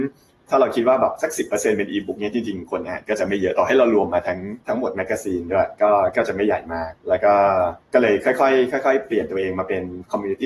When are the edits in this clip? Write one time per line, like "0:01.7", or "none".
0:04.6
0:07.0
0:07.8